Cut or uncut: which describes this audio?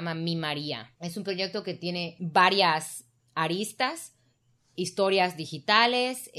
uncut